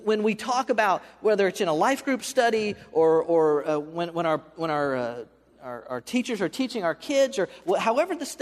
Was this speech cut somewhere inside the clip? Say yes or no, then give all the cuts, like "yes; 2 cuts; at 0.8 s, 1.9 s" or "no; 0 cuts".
no; 0 cuts